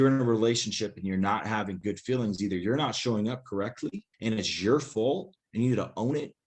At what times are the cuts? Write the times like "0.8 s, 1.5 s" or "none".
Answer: 4.1 s